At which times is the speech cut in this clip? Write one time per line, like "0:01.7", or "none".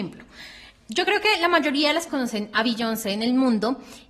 0:02.1